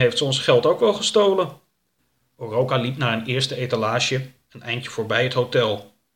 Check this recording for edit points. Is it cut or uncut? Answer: uncut